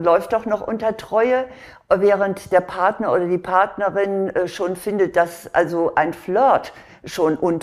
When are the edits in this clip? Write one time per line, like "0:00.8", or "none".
none